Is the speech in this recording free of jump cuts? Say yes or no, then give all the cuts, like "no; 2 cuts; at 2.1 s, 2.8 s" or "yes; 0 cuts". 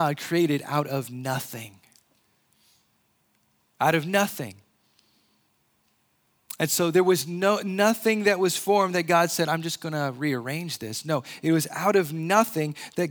yes; 0 cuts